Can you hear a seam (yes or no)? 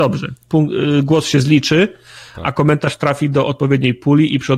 no